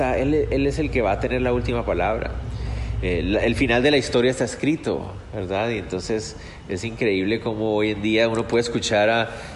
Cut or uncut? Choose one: uncut